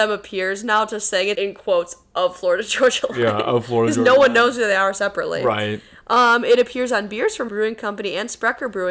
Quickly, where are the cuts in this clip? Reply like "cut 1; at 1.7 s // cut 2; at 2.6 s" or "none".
cut 1; at 1.4 s // cut 2; at 7.5 s